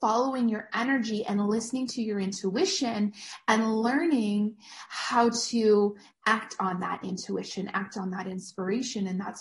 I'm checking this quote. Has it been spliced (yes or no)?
no